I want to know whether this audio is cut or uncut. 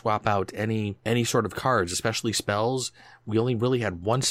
cut